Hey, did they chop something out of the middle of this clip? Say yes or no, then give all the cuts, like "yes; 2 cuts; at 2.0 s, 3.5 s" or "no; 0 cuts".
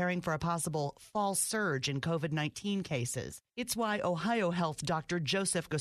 no; 0 cuts